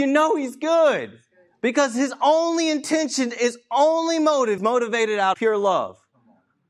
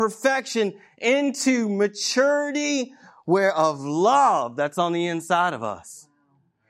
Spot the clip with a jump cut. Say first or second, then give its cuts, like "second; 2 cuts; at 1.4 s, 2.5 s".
first; 2 cuts; at 4.6 s, 5.3 s